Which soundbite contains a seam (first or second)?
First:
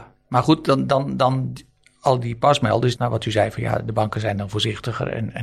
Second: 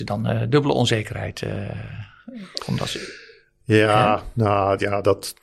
first